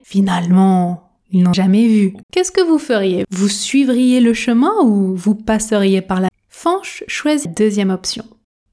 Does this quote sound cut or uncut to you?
cut